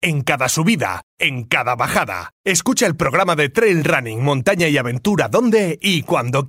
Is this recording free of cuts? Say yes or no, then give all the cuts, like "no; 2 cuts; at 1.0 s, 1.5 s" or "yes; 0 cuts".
yes; 0 cuts